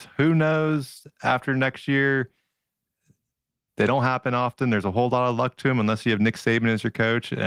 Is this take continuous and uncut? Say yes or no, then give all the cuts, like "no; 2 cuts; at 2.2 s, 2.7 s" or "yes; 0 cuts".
yes; 0 cuts